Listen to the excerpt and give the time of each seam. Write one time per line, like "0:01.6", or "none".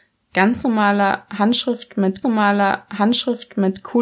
0:02.2